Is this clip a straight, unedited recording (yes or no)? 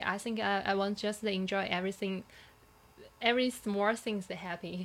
yes